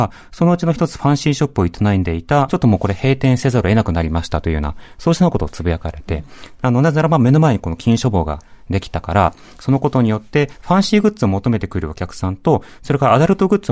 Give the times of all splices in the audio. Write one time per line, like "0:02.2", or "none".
0:02.5